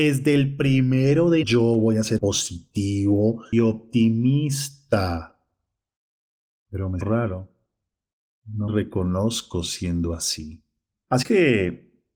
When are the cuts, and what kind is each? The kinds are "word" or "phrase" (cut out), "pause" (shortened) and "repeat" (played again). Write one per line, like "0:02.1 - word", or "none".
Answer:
0:01.4 - word
0:02.2 - word
0:03.5 - word
0:07.0 - word
0:08.7 - word
0:11.2 - word